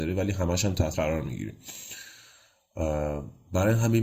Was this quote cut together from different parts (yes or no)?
yes